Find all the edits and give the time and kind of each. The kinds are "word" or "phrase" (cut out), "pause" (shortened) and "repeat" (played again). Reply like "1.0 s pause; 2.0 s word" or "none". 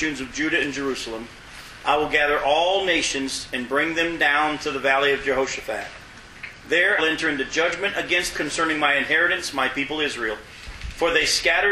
7.0 s word; 8.3 s word